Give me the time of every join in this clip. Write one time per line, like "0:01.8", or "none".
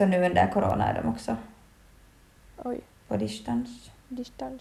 none